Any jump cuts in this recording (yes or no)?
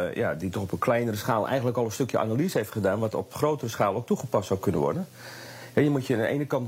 no